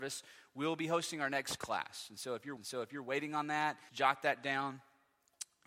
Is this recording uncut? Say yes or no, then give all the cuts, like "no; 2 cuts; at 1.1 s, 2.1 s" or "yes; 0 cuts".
no; 3 cuts; at 1.6 s, 2.6 s, 3.9 s